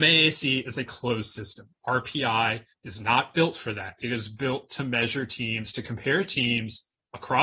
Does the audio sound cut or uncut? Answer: cut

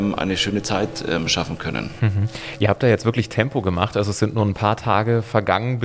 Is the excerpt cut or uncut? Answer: uncut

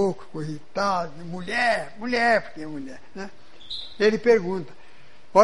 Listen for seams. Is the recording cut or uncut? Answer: uncut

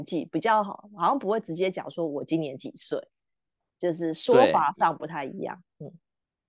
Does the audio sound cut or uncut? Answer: uncut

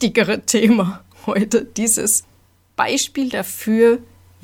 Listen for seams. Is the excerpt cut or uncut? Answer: uncut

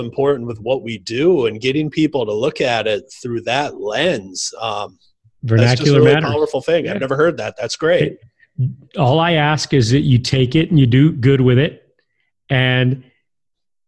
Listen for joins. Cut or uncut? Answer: uncut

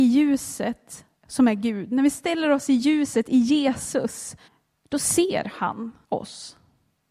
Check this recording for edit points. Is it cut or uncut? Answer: cut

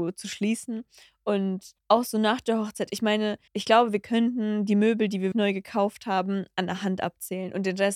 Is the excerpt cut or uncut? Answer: cut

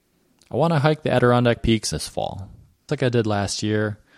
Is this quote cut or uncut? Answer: cut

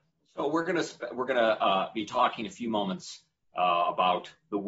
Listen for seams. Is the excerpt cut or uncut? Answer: uncut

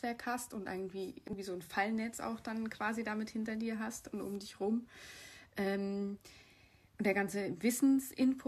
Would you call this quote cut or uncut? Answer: uncut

